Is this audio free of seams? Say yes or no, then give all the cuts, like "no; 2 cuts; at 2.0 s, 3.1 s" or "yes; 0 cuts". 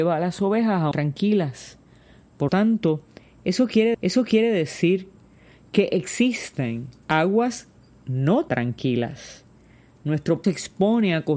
no; 6 cuts; at 0.9 s, 2.5 s, 3.9 s, 7.0 s, 8.5 s, 10.4 s